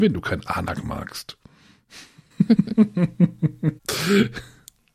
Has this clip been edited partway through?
yes; 1 cut; at 3.8 s

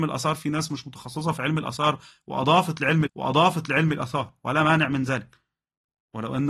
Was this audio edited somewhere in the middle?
yes; 1 cut; at 3.1 s

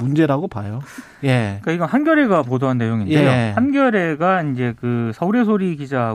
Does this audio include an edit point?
no; 0 cuts

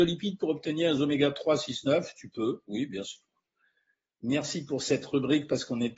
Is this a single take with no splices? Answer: yes; 0 cuts

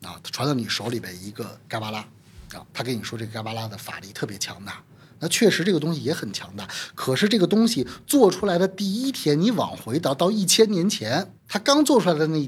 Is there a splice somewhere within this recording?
yes; 2 cuts; at 2.7 s, 11.4 s

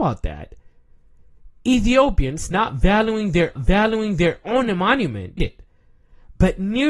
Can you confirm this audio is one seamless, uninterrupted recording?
no; 2 cuts; at 3.6 s, 5.4 s

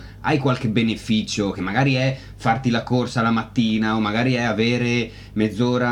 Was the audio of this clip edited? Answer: no; 0 cuts

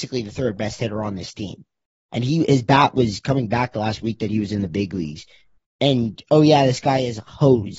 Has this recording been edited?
no; 0 cuts

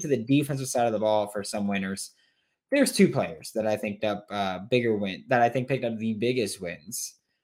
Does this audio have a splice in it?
yes; 1 cut; at 4.0 s

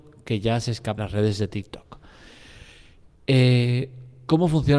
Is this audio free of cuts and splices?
no; 1 cut; at 1.0 s

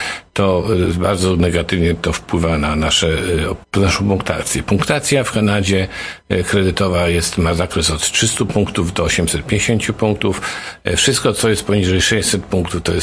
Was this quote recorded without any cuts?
no; 1 cut; at 3.6 s

